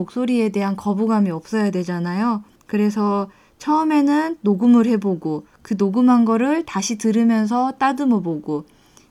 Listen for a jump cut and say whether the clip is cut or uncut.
cut